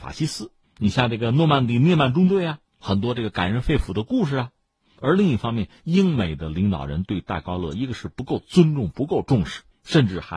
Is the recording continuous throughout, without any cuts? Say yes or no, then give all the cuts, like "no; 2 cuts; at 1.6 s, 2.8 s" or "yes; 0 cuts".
yes; 0 cuts